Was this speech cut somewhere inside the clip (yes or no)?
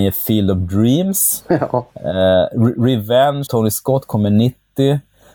yes